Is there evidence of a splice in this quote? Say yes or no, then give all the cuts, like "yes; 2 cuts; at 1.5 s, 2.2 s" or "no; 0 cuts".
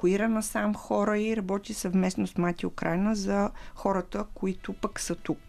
no; 0 cuts